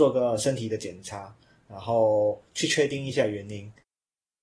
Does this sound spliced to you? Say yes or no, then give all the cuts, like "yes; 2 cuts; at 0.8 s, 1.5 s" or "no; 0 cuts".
no; 0 cuts